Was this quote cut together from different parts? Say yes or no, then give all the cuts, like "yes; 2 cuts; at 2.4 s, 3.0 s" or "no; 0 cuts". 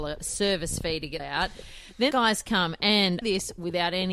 yes; 3 cuts; at 1.2 s, 2.1 s, 3.2 s